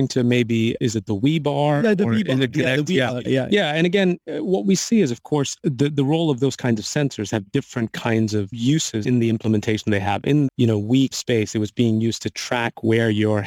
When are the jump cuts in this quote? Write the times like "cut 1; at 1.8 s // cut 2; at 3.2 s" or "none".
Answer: cut 1; at 3.2 s // cut 2; at 10.5 s // cut 3; at 11.1 s